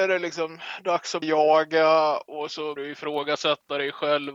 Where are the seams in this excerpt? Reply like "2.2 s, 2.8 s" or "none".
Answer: 1.2 s, 2.8 s